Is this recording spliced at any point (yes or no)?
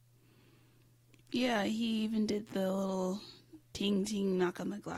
yes